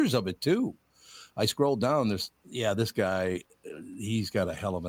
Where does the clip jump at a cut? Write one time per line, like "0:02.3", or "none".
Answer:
0:02.4